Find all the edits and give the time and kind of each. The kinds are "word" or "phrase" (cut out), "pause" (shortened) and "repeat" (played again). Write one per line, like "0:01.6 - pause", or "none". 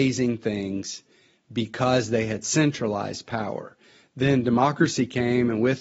none